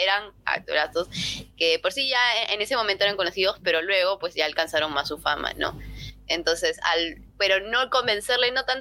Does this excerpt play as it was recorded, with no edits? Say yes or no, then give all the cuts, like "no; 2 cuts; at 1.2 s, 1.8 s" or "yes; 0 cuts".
yes; 0 cuts